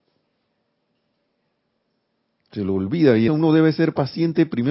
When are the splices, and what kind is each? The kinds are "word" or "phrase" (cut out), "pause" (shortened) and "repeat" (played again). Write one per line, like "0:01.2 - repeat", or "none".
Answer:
0:03.3 - word